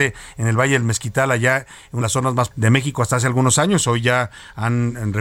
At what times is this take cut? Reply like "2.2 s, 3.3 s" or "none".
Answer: 2.0 s, 2.5 s